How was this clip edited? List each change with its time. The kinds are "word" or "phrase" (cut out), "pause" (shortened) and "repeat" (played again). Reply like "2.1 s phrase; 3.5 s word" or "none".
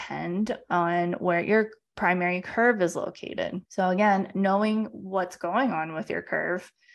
3.6 s pause

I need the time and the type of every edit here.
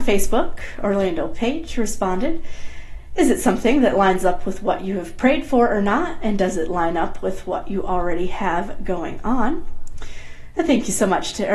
none

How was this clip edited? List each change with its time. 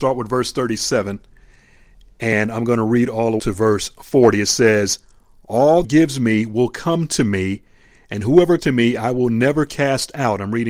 3.4 s word; 5.8 s phrase; 8.6 s word

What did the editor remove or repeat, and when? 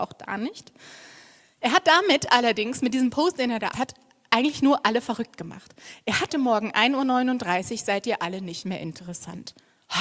3.7 s word; 6.3 s phrase

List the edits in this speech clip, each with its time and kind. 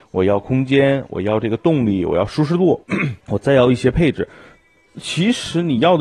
2.8 s pause; 3.2 s pause

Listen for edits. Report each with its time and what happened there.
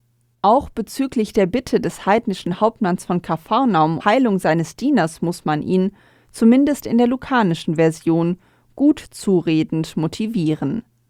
4.0 s word

